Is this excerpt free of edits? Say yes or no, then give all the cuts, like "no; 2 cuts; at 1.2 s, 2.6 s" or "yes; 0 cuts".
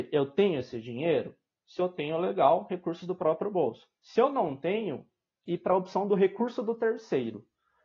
no; 1 cut; at 5.4 s